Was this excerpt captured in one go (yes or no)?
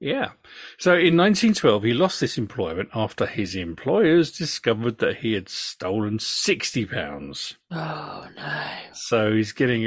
yes